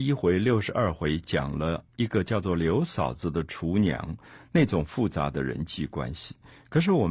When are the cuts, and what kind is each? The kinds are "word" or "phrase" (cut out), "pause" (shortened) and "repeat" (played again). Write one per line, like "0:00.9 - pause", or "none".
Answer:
0:01.9 - pause

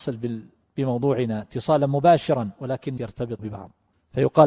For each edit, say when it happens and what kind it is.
0:03.0 - word
0:03.4 - word

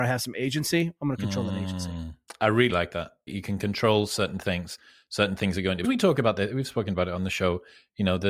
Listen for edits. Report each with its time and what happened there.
0:02.7 - word
0:03.3 - phrase
0:05.8 - phrase

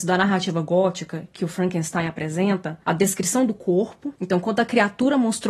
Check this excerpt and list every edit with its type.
0:02.8 - word

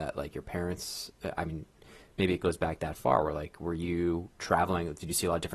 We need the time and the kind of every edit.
none

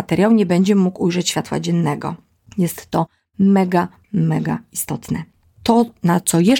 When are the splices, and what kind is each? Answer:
none

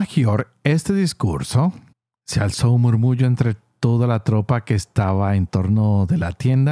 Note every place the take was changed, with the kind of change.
0:01.9 - pause

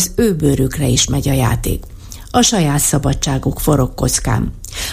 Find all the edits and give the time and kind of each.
none

